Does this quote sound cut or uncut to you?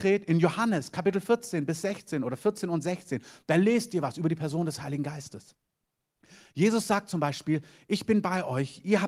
uncut